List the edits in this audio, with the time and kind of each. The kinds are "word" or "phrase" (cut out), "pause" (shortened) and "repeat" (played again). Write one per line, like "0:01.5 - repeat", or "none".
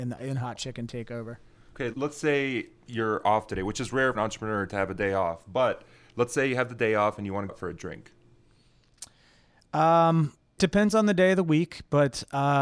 0:01.9 - word
0:04.1 - word
0:07.5 - word
0:10.6 - word